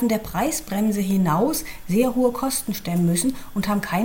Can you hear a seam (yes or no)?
no